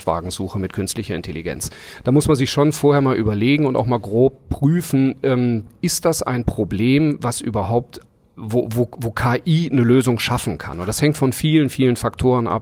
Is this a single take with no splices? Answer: yes; 0 cuts

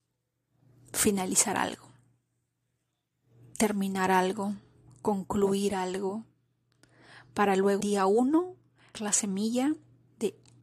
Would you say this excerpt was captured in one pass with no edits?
no; 2 cuts; at 7.8 s, 8.9 s

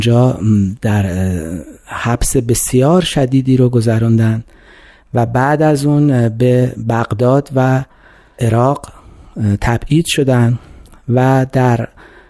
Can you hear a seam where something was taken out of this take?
no; 0 cuts

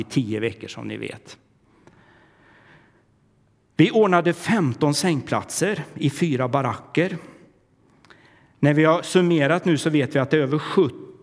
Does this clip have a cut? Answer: no; 0 cuts

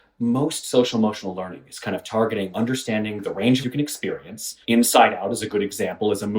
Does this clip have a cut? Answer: yes; 3 cuts; at 2.5 s, 3.6 s, 4.6 s

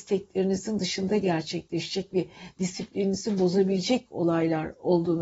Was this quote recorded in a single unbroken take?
yes; 0 cuts

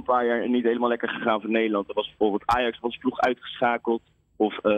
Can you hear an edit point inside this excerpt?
no; 0 cuts

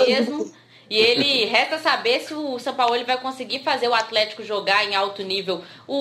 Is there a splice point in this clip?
no; 0 cuts

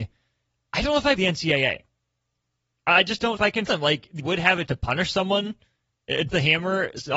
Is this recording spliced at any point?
yes; 6 cuts; at 1.2 s, 3.4 s, 3.7 s, 4.2 s, 4.7 s, 6.3 s

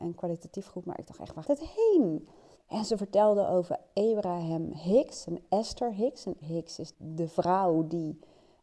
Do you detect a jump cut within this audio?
yes; 4 cuts; at 1.4 s, 2.6 s, 6.4 s, 6.9 s

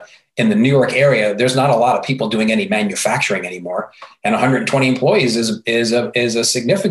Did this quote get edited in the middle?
no; 0 cuts

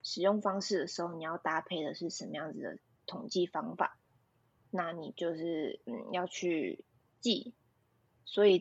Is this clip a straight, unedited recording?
yes; 0 cuts

